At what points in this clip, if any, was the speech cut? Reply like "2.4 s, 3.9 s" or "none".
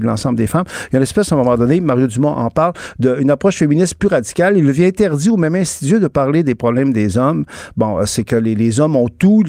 none